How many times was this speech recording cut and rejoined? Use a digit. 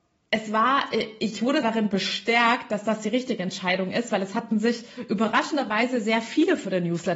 1